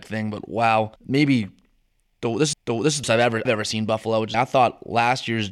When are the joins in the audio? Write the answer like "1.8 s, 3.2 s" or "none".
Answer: 1.0 s, 2.5 s, 3.0 s, 3.4 s, 4.3 s